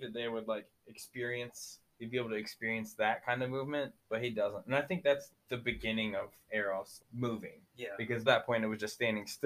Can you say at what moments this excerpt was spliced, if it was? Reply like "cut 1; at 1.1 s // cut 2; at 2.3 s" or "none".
cut 1; at 1.9 s // cut 2; at 4.0 s // cut 3; at 5.3 s // cut 4; at 7.0 s // cut 5; at 7.7 s // cut 6; at 8.3 s